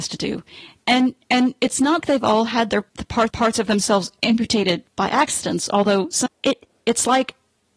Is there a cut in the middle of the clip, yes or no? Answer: yes